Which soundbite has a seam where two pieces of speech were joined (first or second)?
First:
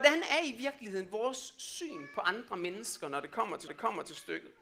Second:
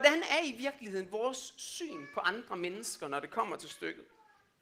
first